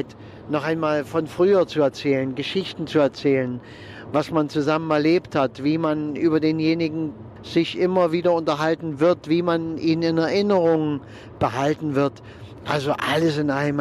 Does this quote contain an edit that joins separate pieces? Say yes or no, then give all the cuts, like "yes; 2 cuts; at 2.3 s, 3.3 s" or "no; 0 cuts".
yes; 1 cut; at 7.4 s